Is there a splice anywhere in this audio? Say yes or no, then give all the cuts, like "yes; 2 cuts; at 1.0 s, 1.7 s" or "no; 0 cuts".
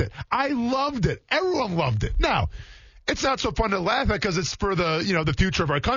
no; 0 cuts